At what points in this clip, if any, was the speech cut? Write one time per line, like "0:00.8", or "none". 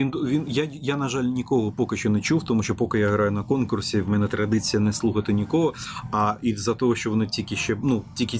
none